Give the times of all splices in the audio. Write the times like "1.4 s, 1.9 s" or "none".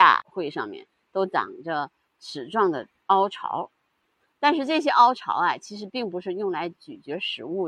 none